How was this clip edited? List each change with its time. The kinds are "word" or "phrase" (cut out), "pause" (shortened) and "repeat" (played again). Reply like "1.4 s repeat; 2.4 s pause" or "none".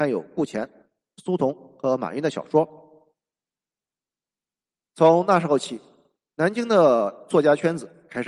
none